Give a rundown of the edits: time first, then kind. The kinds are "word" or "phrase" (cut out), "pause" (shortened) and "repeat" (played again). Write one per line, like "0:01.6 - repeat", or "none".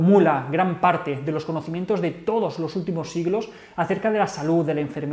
none